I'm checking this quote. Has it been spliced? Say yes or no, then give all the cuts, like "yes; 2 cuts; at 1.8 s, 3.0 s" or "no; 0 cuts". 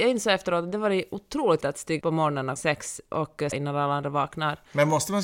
yes; 4 cuts; at 1.6 s, 2.0 s, 2.6 s, 3.5 s